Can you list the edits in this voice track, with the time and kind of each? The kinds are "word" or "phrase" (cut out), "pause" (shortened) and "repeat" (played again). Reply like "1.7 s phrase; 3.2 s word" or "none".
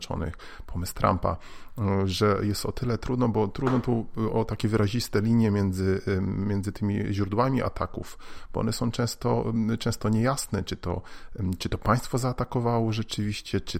none